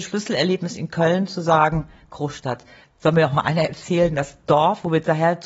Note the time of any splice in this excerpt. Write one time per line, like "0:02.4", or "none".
none